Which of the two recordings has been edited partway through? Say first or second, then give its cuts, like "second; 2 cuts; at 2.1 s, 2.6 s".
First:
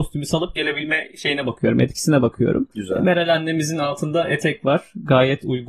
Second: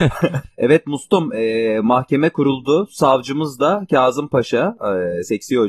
first; 1 cut; at 2.7 s